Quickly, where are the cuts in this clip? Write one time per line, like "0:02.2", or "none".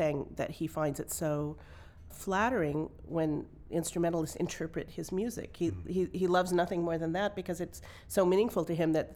0:02.1

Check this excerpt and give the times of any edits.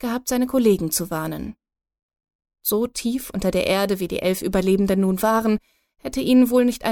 none

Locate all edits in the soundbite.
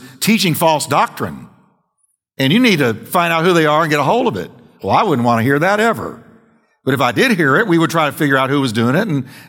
none

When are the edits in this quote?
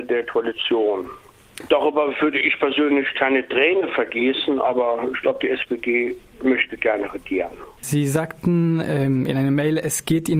0:07.8

